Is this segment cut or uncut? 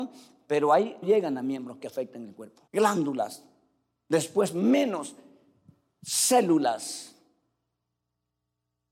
cut